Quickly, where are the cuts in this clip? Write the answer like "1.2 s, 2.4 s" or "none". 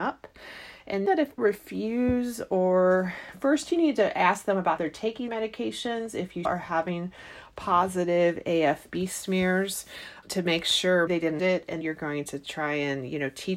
1.1 s, 1.4 s, 4.8 s, 5.3 s, 6.4 s, 10.2 s, 11.1 s, 11.4 s, 11.8 s